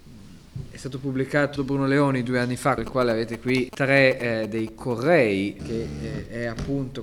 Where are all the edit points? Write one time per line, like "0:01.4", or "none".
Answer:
0:01.6
0:02.8
0:03.7
0:05.6